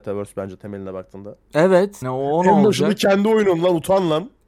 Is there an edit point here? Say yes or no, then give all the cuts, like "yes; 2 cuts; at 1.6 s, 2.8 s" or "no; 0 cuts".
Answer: yes; 1 cut; at 2.0 s